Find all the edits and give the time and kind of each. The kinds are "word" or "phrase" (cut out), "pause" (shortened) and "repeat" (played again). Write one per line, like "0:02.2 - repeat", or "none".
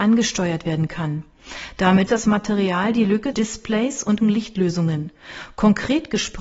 0:02.1 - word
0:03.3 - word
0:04.2 - word